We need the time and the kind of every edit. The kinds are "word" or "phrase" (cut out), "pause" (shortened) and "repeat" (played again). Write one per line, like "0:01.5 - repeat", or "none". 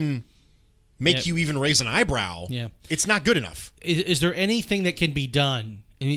none